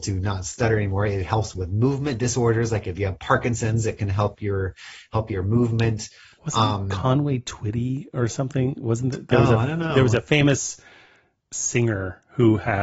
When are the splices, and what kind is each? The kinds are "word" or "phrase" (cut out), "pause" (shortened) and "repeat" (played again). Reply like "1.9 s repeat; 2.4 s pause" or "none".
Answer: none